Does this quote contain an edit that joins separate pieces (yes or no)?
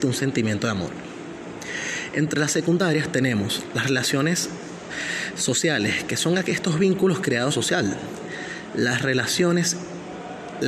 yes